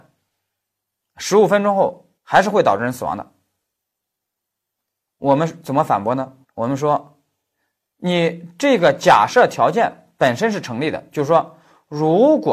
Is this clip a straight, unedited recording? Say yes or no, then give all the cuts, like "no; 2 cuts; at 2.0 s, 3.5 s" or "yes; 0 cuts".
no; 2 cuts; at 2.2 s, 6.4 s